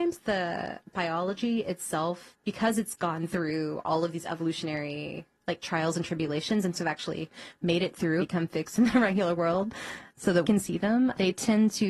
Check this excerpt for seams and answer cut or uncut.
cut